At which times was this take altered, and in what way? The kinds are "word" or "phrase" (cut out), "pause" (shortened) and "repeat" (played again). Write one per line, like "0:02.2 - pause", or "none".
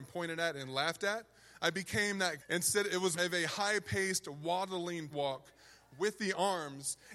0:02.4 - word
0:03.2 - word
0:05.1 - word